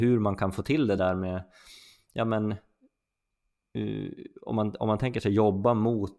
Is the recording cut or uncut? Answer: uncut